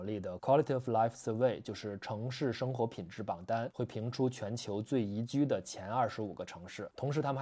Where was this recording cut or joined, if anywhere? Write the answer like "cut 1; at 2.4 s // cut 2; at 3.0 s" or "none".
none